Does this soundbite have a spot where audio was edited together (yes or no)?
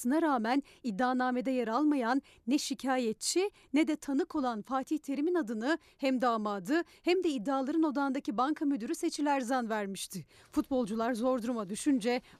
no